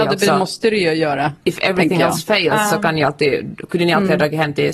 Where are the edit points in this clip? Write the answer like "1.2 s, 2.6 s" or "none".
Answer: 1.4 s

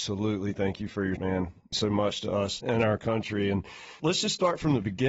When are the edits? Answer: 1.2 s, 1.7 s, 2.6 s, 4.0 s

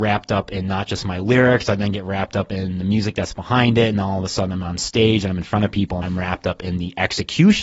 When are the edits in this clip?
6.0 s

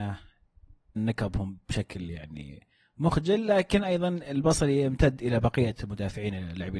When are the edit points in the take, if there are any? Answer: 1.0 s

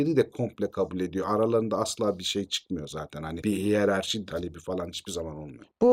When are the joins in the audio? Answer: 4.3 s

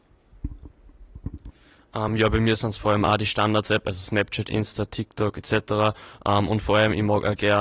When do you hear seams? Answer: none

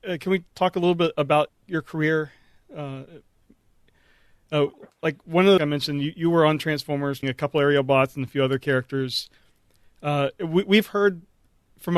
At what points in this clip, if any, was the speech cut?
1.5 s, 5.6 s, 7.2 s

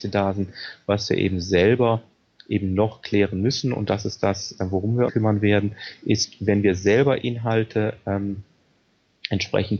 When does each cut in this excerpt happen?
5.1 s

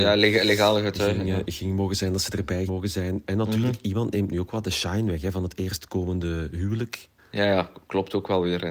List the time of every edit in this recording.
2.7 s, 7.2 s

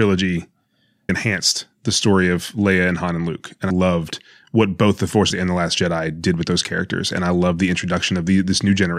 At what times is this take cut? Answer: 1.1 s, 3.7 s, 5.3 s

